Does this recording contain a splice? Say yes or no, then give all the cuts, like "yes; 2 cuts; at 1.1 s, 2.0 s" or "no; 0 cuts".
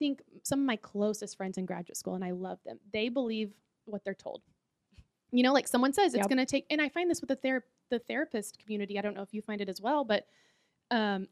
no; 0 cuts